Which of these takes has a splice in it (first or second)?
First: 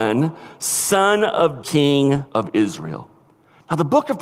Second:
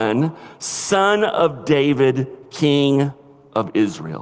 first